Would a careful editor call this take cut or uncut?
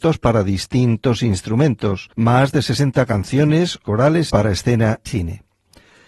cut